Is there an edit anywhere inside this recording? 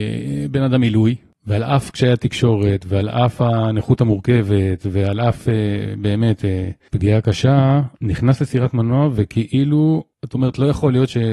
yes; 1 cut; at 8.0 s

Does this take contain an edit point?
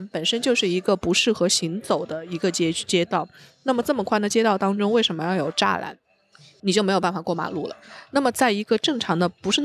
no; 0 cuts

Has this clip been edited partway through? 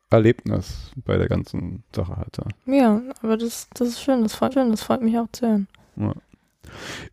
yes; 3 cuts; at 1.9 s, 2.6 s, 4.5 s

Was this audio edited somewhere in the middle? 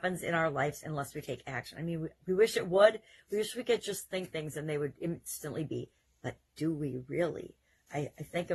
no; 0 cuts

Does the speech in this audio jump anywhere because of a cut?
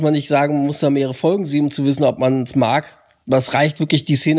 no; 0 cuts

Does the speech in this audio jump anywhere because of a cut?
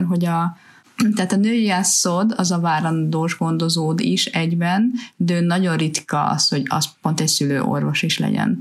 no; 0 cuts

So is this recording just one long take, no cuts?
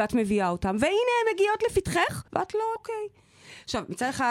no; 2 cuts; at 2.3 s, 2.8 s

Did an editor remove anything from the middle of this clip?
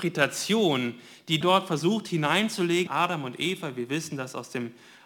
yes; 2 cuts; at 1.4 s, 2.9 s

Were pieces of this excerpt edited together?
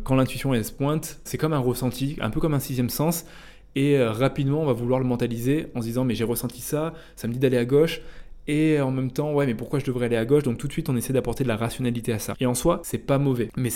yes; 1 cut; at 1.3 s

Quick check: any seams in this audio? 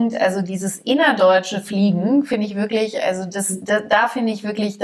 no; 0 cuts

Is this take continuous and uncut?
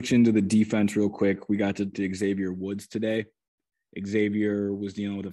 no; 1 cut; at 1.9 s

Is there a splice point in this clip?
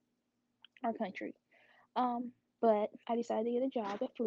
yes; 1 cut; at 3.0 s

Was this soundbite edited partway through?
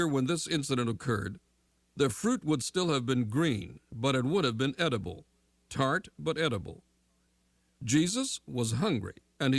no; 0 cuts

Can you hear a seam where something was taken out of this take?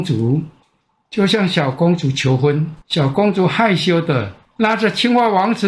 yes; 1 cut; at 2.8 s

